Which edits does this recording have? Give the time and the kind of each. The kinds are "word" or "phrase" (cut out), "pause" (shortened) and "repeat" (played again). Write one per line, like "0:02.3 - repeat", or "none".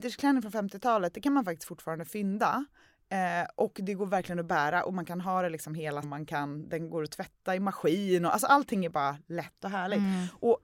0:06.0 - word